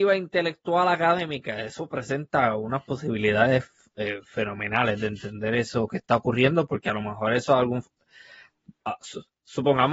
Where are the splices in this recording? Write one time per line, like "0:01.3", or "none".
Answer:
none